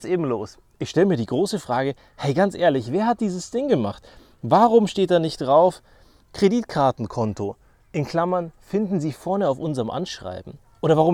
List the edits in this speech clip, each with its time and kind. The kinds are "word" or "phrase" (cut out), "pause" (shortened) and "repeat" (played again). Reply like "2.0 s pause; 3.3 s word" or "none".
none